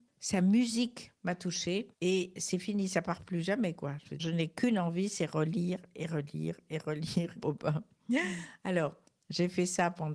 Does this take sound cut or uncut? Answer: cut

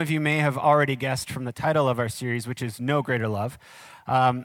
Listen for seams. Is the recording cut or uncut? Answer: uncut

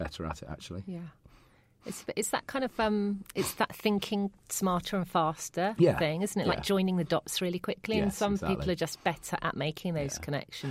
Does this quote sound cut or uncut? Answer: uncut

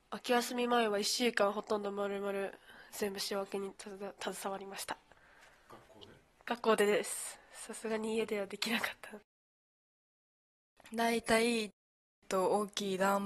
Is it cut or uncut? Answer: cut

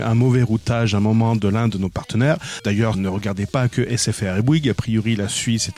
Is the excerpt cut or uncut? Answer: cut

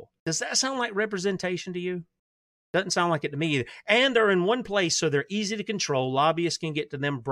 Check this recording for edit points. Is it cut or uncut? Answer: uncut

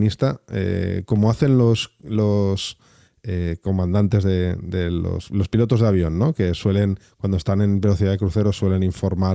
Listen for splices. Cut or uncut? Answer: uncut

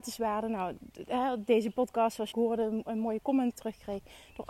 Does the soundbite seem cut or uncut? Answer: cut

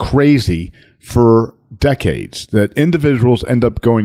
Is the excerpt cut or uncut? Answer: uncut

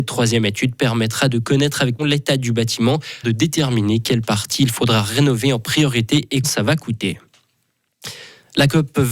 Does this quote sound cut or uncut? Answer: cut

